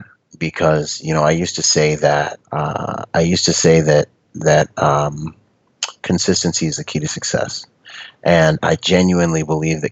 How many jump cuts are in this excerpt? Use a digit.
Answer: 2